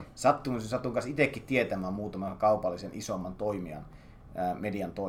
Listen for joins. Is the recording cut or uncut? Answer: uncut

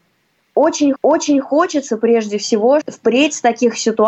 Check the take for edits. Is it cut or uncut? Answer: cut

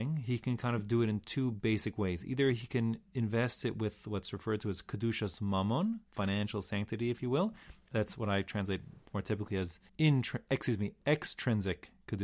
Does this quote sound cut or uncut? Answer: cut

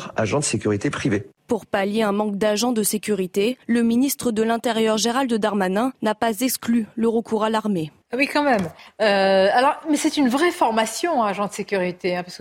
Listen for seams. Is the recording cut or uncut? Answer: cut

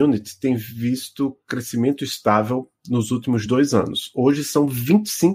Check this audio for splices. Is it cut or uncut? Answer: uncut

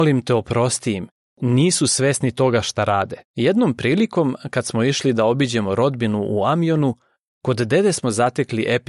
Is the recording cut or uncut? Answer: cut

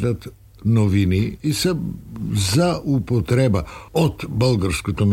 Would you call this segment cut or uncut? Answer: cut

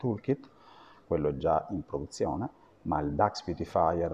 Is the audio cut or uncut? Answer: uncut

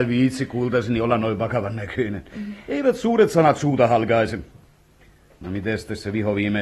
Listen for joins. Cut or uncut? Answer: uncut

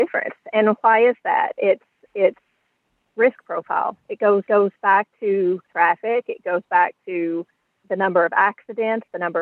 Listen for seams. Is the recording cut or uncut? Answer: cut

